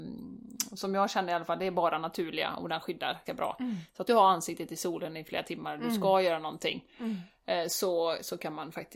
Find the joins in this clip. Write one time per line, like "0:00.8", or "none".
0:03.3
0:04.1

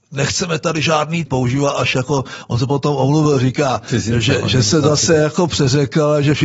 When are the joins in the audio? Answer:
0:01.3

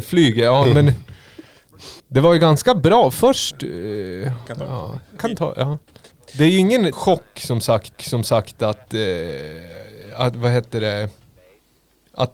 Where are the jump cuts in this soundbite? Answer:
0:02.0
0:05.2
0:06.1
0:06.9
0:07.9

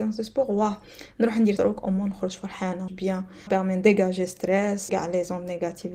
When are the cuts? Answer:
0:01.6
0:02.9
0:03.5
0:04.9

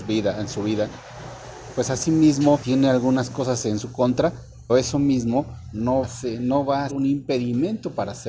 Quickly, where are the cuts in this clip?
0:02.6
0:04.7
0:06.0
0:06.9

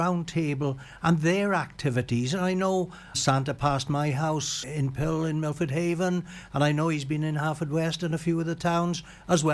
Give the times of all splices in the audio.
0:03.1
0:04.6

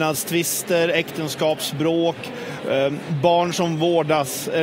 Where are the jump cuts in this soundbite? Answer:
none

